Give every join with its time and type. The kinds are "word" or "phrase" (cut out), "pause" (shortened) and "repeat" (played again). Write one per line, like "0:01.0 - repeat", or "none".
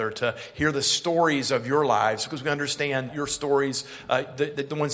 0:03.1 - word